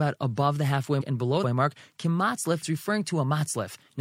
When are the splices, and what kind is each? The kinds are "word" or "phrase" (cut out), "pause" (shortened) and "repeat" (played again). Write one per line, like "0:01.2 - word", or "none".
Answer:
0:01.0 - word
0:01.4 - word
0:02.6 - word